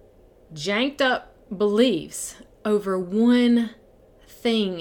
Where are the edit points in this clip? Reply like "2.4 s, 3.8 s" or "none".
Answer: none